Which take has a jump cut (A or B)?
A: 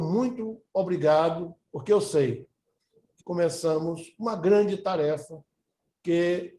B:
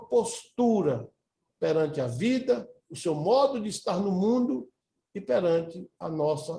A